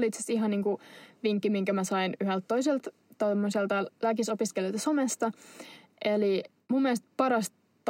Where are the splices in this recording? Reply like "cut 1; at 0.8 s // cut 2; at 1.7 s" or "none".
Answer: none